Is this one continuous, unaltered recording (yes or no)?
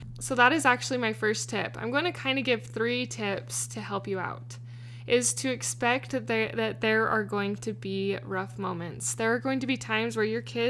yes